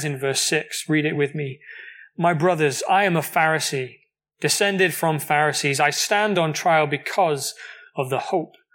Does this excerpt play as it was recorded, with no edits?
yes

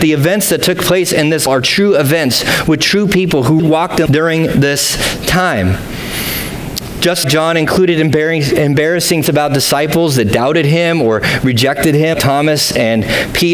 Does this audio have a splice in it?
yes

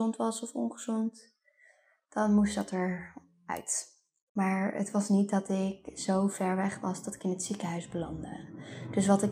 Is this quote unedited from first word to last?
yes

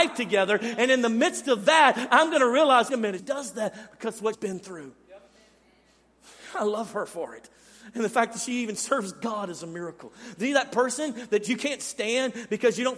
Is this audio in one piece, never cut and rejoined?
no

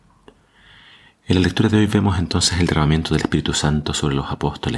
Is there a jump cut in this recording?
no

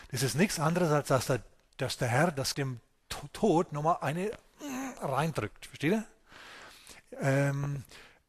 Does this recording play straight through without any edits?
no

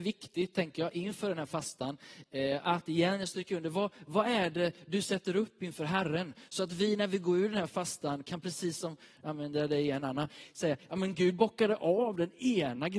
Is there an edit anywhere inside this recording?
no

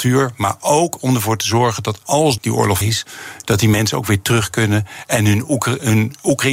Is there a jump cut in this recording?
yes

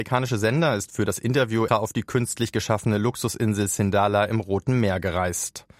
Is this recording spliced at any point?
yes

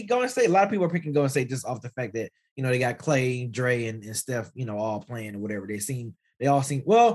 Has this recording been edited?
no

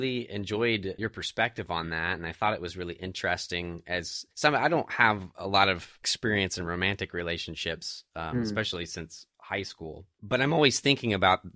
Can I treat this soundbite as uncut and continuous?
no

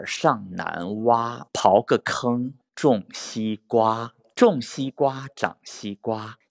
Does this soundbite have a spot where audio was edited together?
no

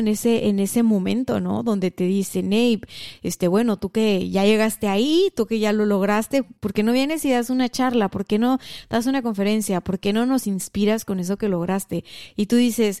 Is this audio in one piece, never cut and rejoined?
no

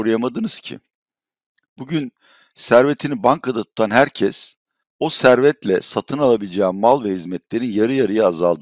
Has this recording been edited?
yes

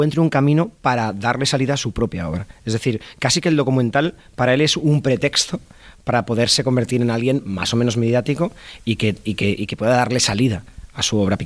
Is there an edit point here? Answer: no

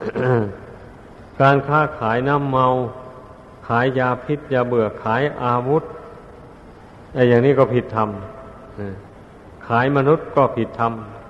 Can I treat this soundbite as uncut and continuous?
no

